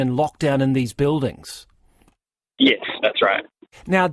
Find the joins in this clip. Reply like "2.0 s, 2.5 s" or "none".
3.0 s